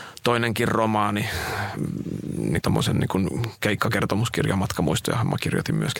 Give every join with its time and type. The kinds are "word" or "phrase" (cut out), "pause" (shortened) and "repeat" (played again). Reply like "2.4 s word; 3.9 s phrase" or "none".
2.6 s phrase